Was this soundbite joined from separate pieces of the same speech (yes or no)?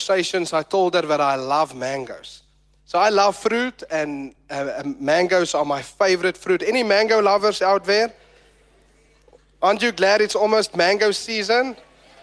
no